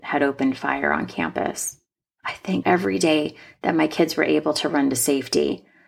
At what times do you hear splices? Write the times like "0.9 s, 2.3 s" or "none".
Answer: 2.6 s